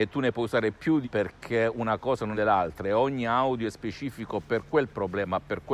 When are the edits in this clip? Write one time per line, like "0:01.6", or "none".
0:01.0
0:02.3

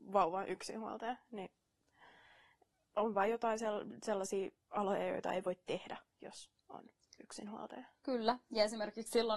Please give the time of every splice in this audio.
none

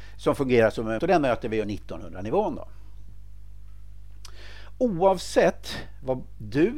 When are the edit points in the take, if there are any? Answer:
0:01.0
0:01.6

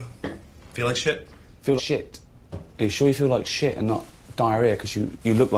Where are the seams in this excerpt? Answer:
0:01.8

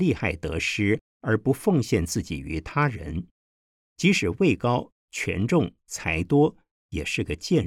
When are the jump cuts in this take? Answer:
none

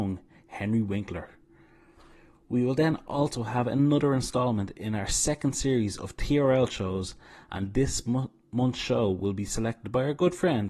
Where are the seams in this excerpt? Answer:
none

